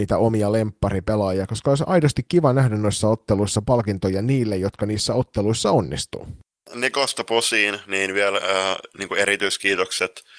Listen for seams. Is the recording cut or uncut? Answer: uncut